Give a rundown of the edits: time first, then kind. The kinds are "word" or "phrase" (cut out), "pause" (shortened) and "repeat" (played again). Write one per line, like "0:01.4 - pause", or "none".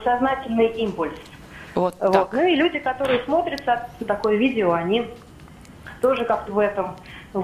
0:06.5 - word